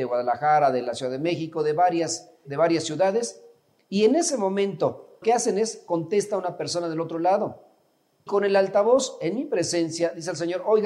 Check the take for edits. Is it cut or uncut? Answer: cut